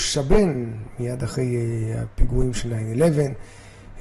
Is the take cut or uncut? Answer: uncut